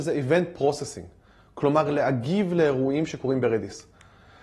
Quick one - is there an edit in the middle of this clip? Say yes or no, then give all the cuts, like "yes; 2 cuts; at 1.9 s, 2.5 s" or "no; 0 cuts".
no; 0 cuts